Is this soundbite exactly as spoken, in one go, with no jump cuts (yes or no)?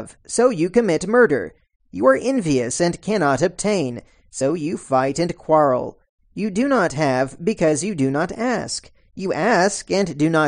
yes